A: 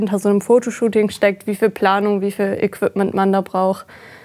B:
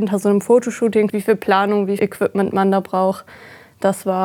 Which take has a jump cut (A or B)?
B